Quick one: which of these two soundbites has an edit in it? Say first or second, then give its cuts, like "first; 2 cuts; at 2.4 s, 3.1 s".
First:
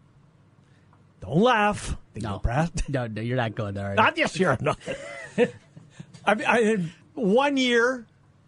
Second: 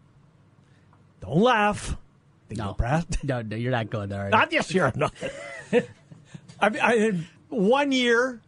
first; 1 cut; at 2.0 s